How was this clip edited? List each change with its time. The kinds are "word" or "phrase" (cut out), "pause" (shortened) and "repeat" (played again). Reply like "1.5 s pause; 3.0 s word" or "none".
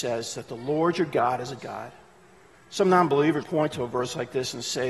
1.6 s word; 3.4 s word